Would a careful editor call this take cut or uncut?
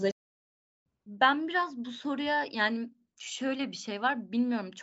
uncut